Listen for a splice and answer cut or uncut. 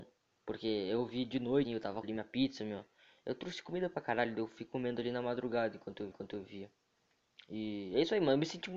cut